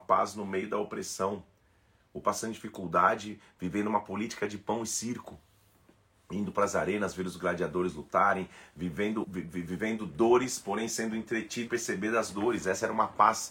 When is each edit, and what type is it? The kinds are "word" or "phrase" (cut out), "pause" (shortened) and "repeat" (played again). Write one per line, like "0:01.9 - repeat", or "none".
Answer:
0:02.2 - word
0:09.2 - word
0:11.7 - word